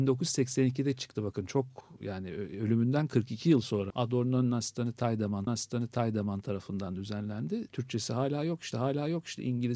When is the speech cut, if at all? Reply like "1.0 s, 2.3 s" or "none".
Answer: 3.9 s, 5.5 s, 8.7 s